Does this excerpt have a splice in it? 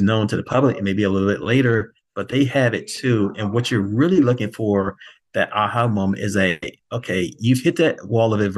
no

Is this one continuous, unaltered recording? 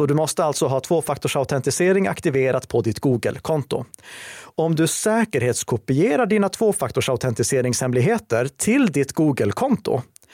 yes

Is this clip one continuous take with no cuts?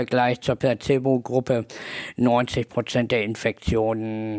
yes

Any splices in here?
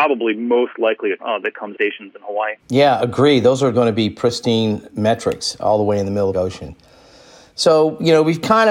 yes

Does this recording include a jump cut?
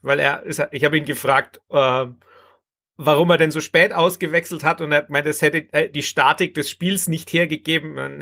no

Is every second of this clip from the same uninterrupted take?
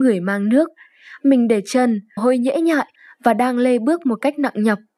no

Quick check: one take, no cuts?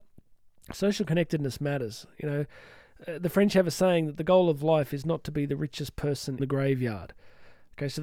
no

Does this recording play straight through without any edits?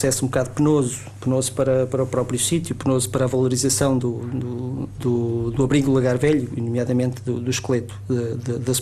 yes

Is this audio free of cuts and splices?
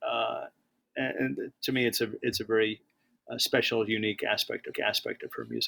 no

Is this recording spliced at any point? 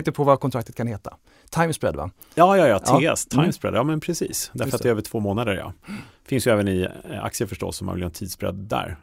no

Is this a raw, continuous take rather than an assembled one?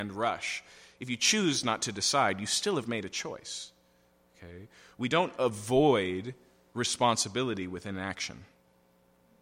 yes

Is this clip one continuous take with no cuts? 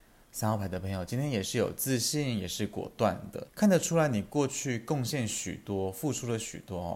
no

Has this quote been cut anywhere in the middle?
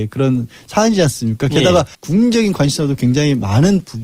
yes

